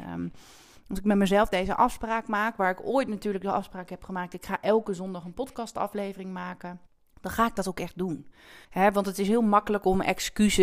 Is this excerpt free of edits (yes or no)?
no